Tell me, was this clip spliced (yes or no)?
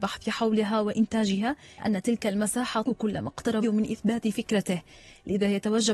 yes